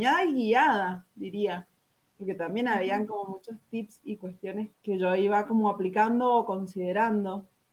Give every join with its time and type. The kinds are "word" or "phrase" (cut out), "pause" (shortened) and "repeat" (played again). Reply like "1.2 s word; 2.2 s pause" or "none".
4.7 s word